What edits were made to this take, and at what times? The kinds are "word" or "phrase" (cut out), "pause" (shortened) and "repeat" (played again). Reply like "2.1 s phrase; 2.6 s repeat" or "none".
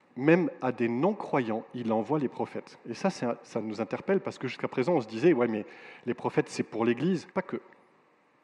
7.3 s pause